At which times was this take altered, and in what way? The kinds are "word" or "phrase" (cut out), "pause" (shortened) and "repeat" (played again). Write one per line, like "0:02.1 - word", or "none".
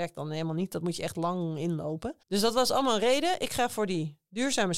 0:02.2 - pause